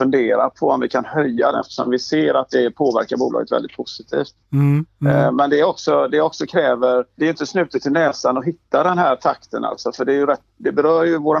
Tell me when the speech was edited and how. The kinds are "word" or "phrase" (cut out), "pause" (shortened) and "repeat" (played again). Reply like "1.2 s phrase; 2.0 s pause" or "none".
1.5 s phrase; 4.4 s pause; 7.2 s word